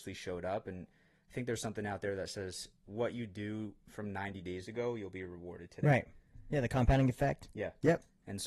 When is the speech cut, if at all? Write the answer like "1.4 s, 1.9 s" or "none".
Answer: none